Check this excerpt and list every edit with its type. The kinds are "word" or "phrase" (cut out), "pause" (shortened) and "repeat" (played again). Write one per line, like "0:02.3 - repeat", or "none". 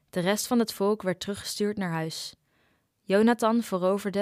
none